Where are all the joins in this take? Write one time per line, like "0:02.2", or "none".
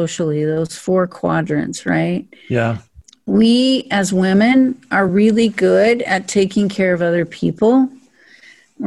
none